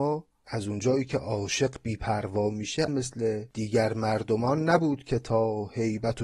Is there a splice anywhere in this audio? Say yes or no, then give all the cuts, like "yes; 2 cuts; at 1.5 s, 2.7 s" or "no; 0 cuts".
yes; 1 cut; at 2.9 s